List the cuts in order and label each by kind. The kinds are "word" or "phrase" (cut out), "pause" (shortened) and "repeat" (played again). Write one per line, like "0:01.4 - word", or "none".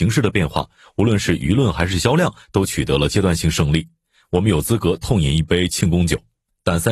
none